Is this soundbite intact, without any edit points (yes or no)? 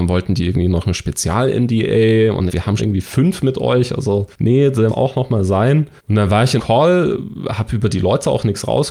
no